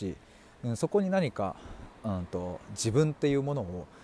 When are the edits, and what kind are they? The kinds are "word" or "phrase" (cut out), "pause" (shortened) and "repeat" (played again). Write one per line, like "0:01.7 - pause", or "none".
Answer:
none